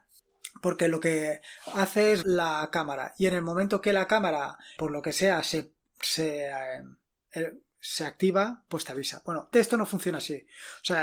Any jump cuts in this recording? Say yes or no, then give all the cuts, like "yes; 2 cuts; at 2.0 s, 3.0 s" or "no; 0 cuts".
yes; 3 cuts; at 2.2 s, 4.8 s, 9.5 s